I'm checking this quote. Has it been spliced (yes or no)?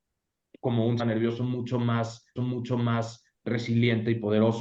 yes